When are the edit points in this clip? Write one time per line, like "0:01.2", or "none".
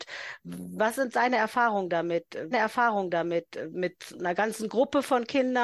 0:02.5